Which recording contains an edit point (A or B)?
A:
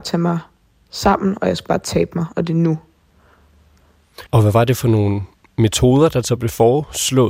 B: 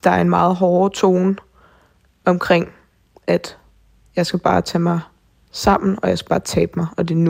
A